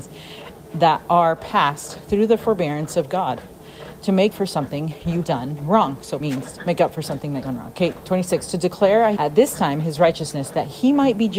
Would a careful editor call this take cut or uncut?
cut